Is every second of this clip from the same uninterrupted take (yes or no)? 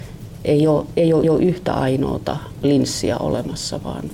no